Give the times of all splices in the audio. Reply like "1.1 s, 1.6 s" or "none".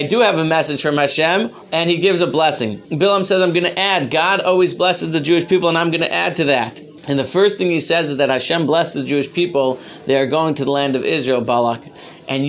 1.6 s, 2.8 s, 7.0 s